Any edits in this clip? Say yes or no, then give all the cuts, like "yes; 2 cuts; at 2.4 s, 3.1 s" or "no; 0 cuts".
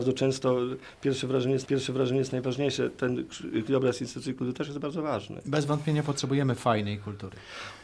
yes; 2 cuts; at 1.6 s, 3.7 s